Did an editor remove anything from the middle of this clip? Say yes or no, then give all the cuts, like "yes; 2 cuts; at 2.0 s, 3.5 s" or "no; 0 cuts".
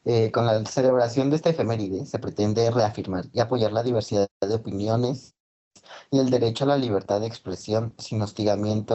yes; 1 cut; at 4.3 s